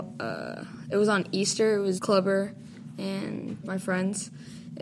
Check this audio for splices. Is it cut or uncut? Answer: cut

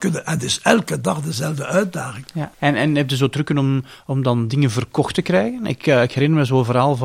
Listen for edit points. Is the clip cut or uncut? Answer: cut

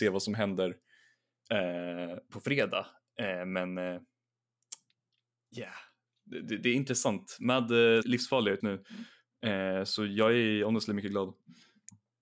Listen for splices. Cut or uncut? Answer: cut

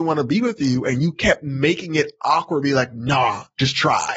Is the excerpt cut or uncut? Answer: uncut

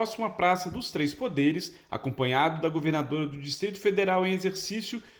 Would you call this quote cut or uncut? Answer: uncut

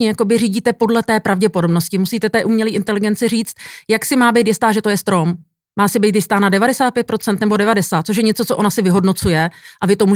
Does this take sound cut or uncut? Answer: uncut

